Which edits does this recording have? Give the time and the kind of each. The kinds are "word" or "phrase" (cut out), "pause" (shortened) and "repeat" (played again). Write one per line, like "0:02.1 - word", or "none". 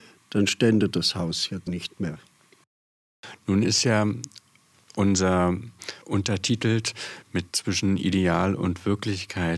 0:01.7 - word
0:06.0 - word
0:07.5 - phrase

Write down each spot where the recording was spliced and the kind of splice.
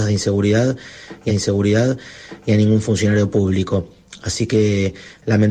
0:01.3 - repeat

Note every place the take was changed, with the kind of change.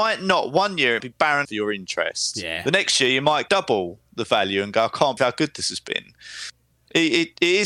0:01.0 - word
0:01.4 - word
0:03.5 - word
0:05.2 - word

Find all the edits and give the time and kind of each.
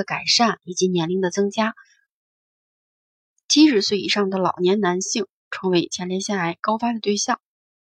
none

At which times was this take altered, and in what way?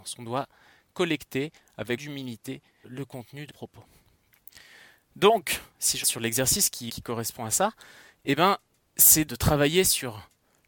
0:02.0 - word
0:02.8 - word
0:03.5 - word
0:06.0 - word
0:06.9 - word
0:09.3 - word

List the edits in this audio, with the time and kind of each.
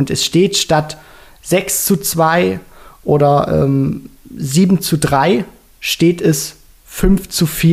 none

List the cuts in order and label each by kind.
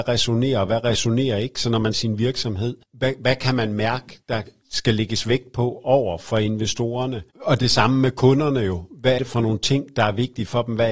0:01.9 - phrase
0:02.8 - pause
0:04.2 - pause
0:07.3 - pause
0:09.2 - word

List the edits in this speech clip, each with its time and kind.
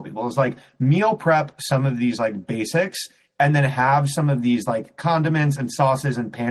none

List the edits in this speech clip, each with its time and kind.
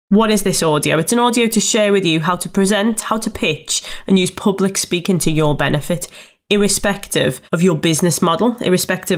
0:07.5 - pause

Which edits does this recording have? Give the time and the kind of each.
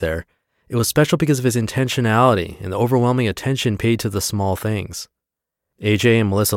none

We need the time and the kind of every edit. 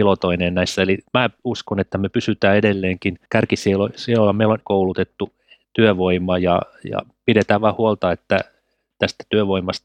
0:01.1 - pause
0:03.3 - pause
0:04.6 - phrase

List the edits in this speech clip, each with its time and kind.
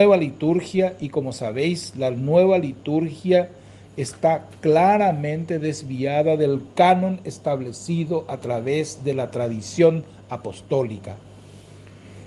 none

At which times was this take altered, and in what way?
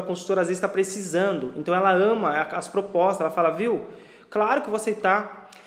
none

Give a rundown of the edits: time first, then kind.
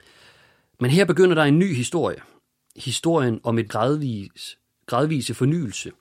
0:03.7 - word

